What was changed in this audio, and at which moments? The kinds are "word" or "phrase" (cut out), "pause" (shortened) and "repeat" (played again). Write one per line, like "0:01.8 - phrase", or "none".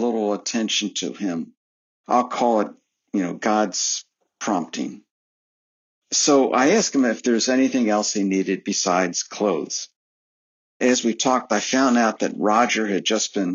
none

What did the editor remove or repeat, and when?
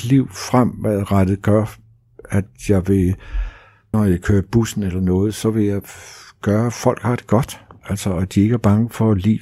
0:03.9 - word

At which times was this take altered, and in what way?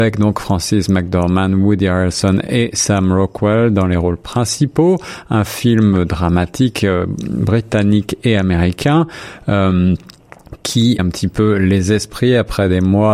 0:11.0 - phrase

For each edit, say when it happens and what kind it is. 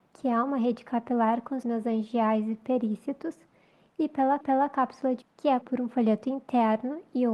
0:01.6 - word
0:04.4 - repeat
0:05.2 - word
0:05.6 - word

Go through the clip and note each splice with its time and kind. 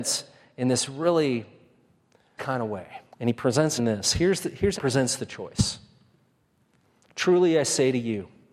0:02.4 - word
0:03.1 - pause
0:03.8 - phrase
0:04.8 - phrase

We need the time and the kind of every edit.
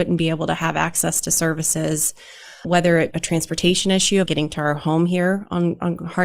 0:02.6 - word
0:03.1 - word
0:04.3 - word

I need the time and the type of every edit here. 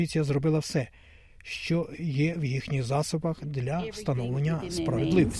none

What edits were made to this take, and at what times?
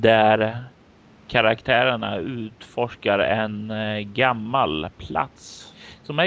none

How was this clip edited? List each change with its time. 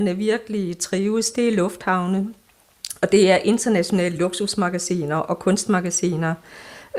none

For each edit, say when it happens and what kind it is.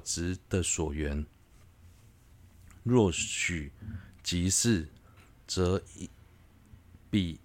0:05.2 - pause

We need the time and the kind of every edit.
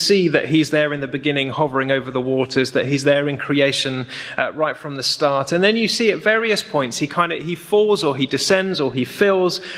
none

